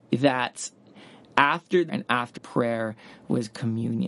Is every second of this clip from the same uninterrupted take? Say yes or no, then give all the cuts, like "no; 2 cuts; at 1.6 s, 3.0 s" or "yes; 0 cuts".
no; 2 cuts; at 1.9 s, 2.4 s